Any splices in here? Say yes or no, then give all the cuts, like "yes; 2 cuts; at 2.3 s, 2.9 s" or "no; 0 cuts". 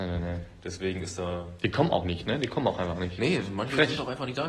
no; 0 cuts